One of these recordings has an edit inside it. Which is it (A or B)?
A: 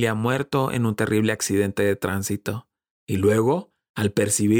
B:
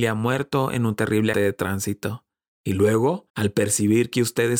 B